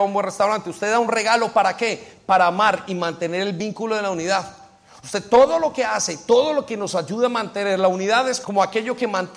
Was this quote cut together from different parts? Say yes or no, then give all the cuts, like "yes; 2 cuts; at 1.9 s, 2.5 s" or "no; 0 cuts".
yes; 1 cut; at 8.4 s